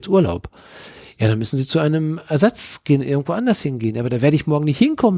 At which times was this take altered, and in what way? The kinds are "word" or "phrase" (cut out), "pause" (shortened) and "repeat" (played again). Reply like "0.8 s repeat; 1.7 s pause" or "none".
none

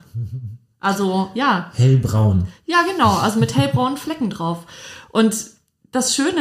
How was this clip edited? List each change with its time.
none

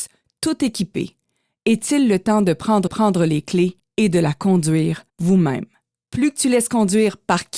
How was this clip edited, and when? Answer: 2.9 s repeat; 5.1 s pause

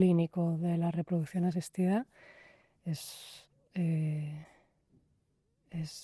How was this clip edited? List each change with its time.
none

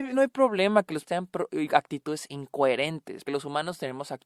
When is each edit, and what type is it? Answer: 1.1 s word; 3.3 s word

